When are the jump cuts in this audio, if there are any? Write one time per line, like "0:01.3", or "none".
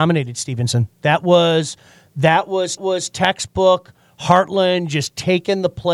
0:02.8